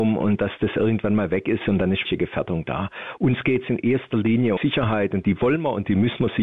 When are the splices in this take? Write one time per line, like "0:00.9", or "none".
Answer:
0:02.0
0:04.6

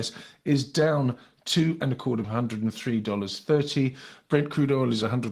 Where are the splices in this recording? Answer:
0:02.2

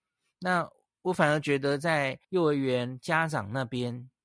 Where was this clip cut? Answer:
0:02.2

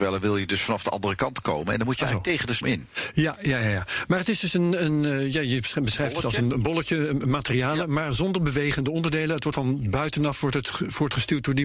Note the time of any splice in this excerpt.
0:02.6
0:09.5

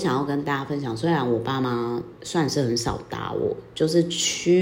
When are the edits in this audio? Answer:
0:02.2

